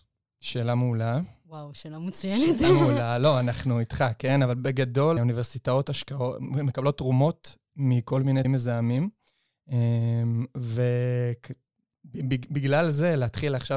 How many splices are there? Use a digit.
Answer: 3